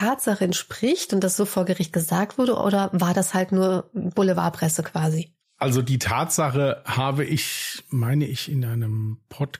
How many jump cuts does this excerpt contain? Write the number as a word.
one